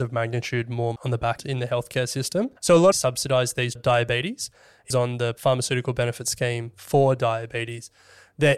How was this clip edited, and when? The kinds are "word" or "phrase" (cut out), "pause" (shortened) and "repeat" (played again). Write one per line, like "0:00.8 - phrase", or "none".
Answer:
0:01.0 - word
0:01.4 - word
0:02.6 - pause
0:02.9 - phrase
0:03.8 - phrase
0:04.9 - phrase